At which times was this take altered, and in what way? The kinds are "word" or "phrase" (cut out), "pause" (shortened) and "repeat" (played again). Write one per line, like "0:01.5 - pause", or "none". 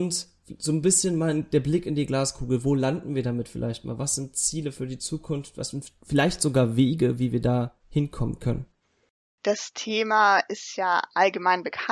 0:07.8 - pause
0:08.8 - pause